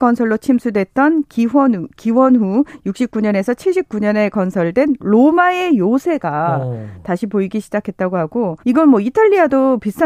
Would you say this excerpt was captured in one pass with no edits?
no; 1 cut; at 8.6 s

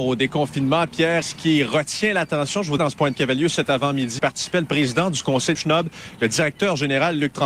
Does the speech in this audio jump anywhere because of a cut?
yes; 5 cuts; at 1.2 s, 2.8 s, 3.1 s, 4.2 s, 5.5 s

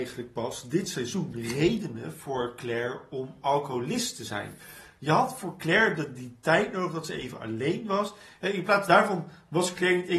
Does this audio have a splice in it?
no; 0 cuts

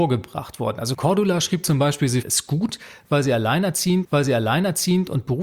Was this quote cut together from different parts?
yes; 2 cuts; at 2.2 s, 4.0 s

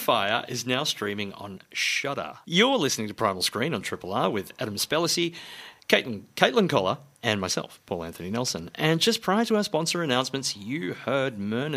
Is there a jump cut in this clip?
no; 0 cuts

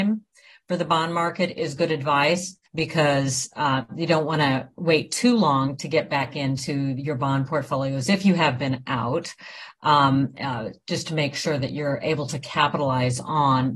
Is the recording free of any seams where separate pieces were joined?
no; 1 cut; at 2.7 s

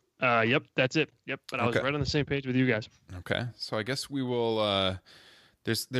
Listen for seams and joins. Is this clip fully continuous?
yes; 0 cuts

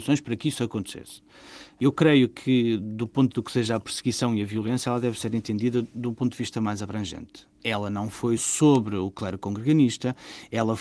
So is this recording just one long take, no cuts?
no; 2 cuts; at 3.3 s, 8.4 s

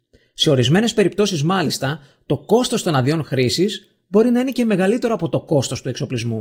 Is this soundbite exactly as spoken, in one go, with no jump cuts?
yes; 0 cuts

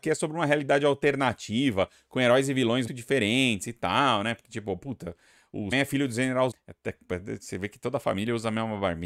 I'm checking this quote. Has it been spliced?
yes; 3 cuts; at 2.9 s, 5.7 s, 6.5 s

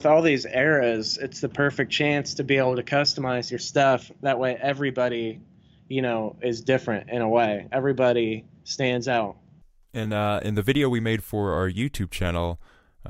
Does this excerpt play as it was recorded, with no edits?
yes; 0 cuts

